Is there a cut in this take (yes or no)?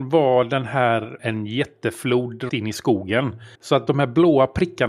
yes